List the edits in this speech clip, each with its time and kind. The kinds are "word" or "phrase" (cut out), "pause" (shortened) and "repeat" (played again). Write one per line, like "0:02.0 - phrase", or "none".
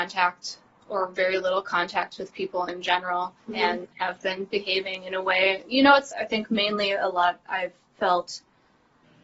0:03.4 - pause
0:06.1 - word